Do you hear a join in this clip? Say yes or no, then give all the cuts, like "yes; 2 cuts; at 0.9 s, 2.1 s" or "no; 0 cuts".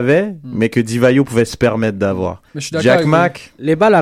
yes; 1 cut; at 2.5 s